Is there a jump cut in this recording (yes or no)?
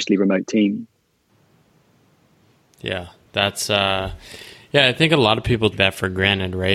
yes